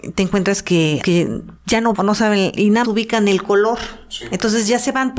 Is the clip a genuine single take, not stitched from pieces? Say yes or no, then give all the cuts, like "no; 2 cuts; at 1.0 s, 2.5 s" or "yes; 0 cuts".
no; 4 cuts; at 1.0 s, 1.6 s, 1.9 s, 2.8 s